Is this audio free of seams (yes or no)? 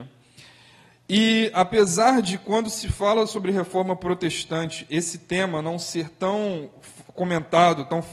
yes